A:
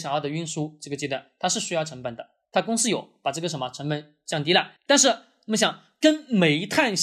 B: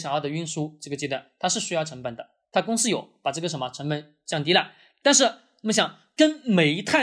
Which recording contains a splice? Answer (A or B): A